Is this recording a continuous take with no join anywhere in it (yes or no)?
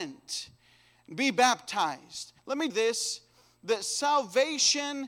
no